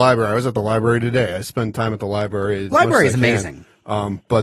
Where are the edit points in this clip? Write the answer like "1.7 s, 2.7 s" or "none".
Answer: 2.7 s